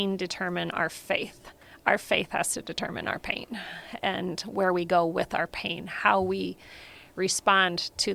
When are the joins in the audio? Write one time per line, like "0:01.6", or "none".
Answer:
none